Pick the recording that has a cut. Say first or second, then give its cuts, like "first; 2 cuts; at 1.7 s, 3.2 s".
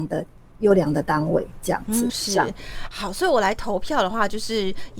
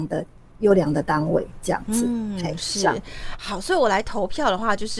first; 1 cut; at 2.1 s